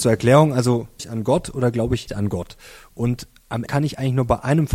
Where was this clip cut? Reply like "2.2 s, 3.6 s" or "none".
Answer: 1.0 s, 2.1 s, 3.7 s